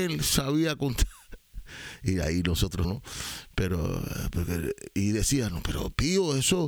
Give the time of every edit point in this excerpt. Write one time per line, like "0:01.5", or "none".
0:02.8